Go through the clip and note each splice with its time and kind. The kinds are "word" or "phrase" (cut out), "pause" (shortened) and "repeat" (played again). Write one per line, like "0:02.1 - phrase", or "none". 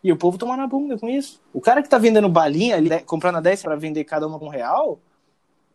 0:01.4 - pause
0:02.9 - word
0:03.6 - word
0:04.4 - word